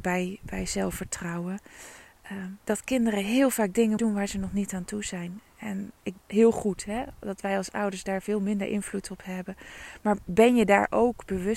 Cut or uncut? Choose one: cut